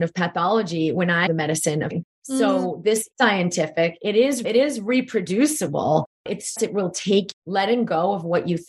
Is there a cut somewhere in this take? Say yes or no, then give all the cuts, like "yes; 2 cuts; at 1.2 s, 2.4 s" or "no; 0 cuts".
yes; 6 cuts; at 1.3 s, 1.9 s, 3.1 s, 4.4 s, 6.6 s, 7.3 s